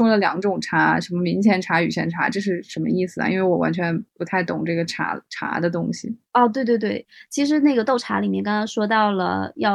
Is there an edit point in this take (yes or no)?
no